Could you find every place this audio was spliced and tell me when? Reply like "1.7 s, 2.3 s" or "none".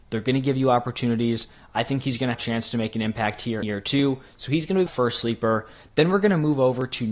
2.3 s, 3.6 s, 4.9 s